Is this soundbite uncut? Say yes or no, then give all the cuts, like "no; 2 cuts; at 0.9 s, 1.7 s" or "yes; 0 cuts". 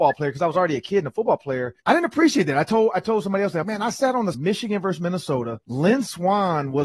no; 4 cuts; at 1.8 s, 3.6 s, 4.3 s, 5.6 s